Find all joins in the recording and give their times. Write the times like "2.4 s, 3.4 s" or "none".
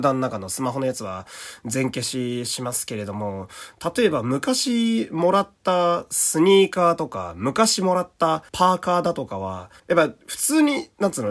8.5 s, 9.8 s

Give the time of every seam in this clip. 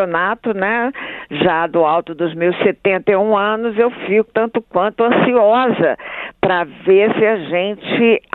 4.3 s

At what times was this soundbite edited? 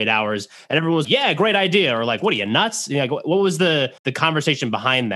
1.0 s, 4.0 s

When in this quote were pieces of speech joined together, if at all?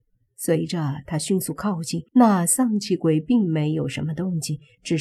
2.1 s

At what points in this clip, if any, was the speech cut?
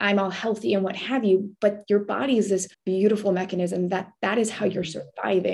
2.7 s

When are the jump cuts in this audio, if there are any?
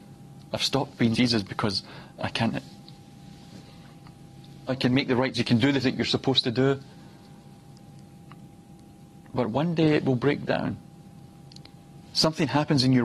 1.1 s, 2.5 s, 4.7 s, 5.3 s, 5.8 s

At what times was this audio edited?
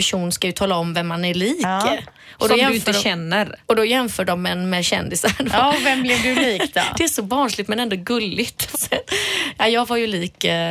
8.7 s

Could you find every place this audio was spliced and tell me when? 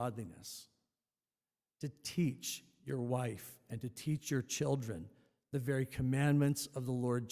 none

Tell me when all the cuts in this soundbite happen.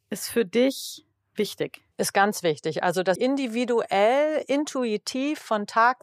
1.9 s, 3.2 s

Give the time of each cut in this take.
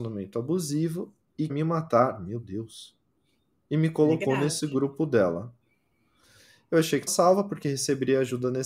1.5 s, 7.1 s

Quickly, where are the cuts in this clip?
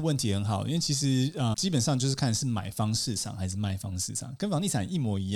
1.5 s

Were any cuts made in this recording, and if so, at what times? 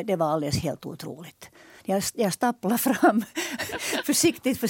none

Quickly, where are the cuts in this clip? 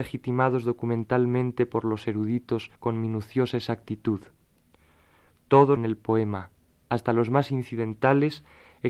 2.8 s, 5.8 s

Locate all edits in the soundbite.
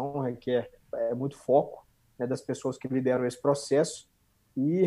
none

